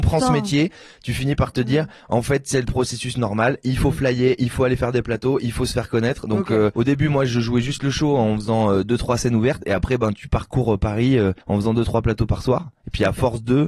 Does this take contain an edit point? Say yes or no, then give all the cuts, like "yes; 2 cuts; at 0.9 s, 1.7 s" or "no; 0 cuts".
yes; 1 cut; at 11.4 s